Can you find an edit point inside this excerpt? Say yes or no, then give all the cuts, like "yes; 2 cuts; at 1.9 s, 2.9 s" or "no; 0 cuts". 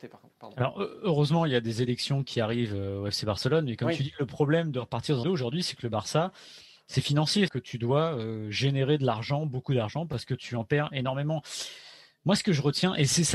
yes; 2 cuts; at 5.2 s, 7.5 s